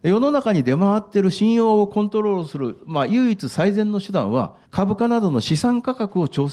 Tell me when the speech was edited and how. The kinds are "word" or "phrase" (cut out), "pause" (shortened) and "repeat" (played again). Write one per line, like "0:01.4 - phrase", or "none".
0:04.7 - pause